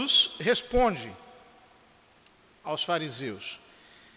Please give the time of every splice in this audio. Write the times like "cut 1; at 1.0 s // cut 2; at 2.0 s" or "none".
none